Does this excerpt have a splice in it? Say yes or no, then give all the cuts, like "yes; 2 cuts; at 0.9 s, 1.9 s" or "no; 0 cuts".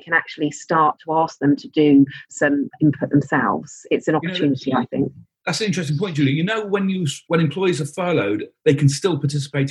no; 0 cuts